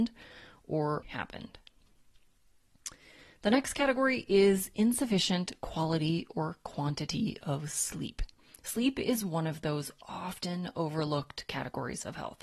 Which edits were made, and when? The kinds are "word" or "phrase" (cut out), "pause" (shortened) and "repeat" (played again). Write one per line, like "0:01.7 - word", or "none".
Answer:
0:01.0 - word